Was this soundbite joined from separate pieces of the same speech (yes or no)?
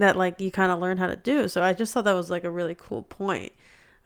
no